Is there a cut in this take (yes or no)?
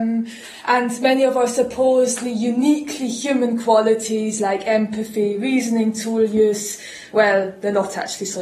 no